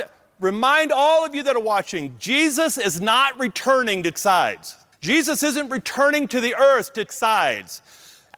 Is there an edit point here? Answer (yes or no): yes